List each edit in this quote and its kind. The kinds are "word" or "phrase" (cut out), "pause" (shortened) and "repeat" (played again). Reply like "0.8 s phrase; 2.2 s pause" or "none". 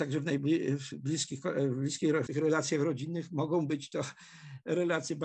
2.3 s word